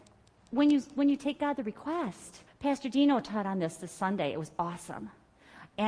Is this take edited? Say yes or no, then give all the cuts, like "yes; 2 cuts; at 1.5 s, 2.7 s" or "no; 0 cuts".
yes; 1 cut; at 2.5 s